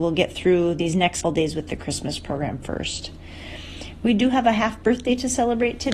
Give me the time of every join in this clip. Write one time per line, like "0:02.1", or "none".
0:01.2